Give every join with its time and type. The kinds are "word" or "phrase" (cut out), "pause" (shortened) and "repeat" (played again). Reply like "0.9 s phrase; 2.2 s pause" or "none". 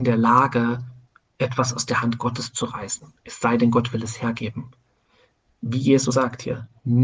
6.1 s word

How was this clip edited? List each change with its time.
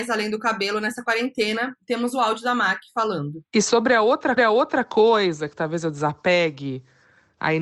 4.4 s repeat

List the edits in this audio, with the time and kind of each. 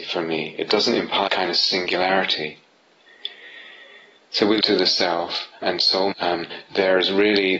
1.3 s word; 4.6 s word; 5.6 s word; 6.1 s word

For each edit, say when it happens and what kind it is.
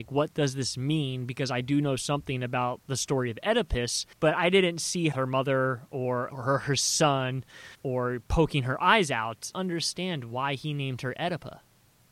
4.1 s pause; 5.1 s phrase; 6.3 s word; 7.7 s pause; 9.5 s phrase

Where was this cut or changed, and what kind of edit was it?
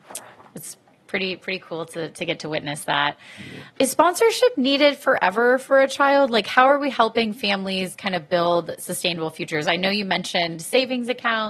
3.8 s word

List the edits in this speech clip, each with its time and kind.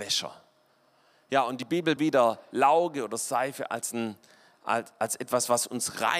2.0 s phrase

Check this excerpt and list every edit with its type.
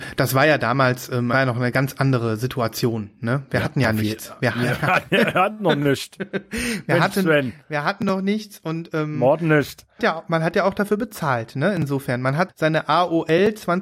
1.3 s phrase; 10.0 s phrase; 12.5 s word

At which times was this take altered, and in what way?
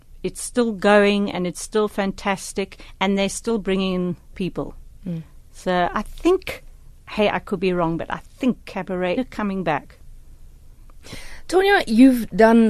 4.3 s word; 9.2 s phrase

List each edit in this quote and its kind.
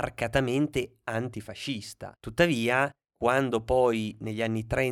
2.2 s pause

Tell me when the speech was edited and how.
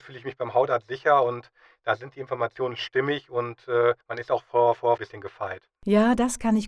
4.0 s pause; 5.0 s phrase

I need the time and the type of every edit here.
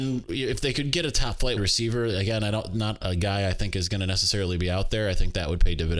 1.6 s word

